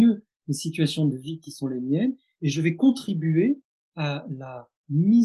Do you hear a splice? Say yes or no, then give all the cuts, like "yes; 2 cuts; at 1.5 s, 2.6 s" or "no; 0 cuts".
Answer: no; 0 cuts